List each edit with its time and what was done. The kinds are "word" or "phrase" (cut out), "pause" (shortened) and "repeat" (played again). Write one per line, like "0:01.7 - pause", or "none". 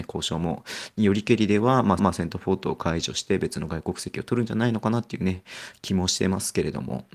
0:02.0 - repeat